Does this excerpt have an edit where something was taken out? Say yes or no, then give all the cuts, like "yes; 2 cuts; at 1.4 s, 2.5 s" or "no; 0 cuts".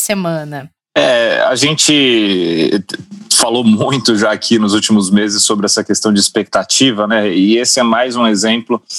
no; 0 cuts